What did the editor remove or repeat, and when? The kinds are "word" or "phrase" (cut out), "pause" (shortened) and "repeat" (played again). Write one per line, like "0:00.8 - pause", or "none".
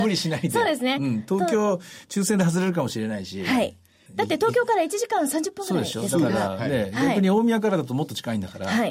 0:04.1 - word

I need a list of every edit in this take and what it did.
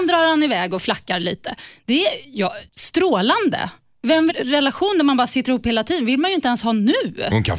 0:02.7 - pause
0:04.3 - phrase

